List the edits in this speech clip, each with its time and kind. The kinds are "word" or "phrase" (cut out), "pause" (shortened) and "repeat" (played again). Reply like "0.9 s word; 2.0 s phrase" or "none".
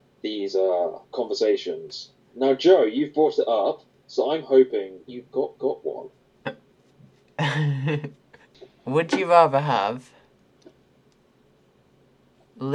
1.0 s pause; 5.1 s word; 5.6 s repeat